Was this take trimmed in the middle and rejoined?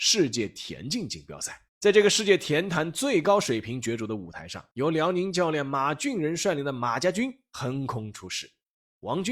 yes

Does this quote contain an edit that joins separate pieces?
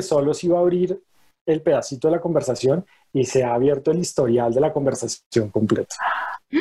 no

